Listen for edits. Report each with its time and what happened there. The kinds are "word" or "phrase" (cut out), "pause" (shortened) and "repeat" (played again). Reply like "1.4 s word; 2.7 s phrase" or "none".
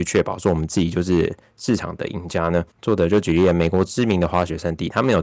2.7 s pause